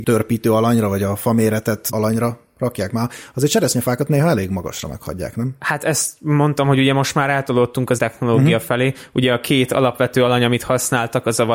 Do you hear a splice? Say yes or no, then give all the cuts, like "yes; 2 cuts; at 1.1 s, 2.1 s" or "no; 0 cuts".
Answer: yes; 2 cuts; at 1.9 s, 8.0 s